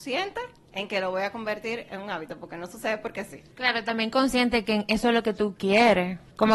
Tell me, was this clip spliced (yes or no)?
no